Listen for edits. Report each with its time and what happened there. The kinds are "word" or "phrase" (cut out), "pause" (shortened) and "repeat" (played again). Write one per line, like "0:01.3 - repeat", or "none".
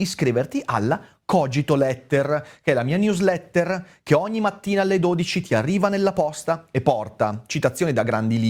none